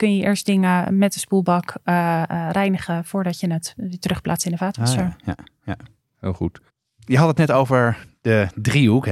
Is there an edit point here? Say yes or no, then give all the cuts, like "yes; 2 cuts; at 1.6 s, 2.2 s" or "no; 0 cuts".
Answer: no; 0 cuts